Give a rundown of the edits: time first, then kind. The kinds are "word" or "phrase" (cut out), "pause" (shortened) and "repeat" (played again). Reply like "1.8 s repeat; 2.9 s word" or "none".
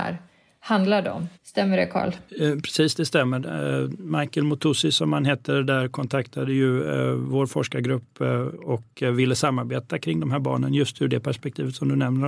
1.3 s pause; 2.3 s pause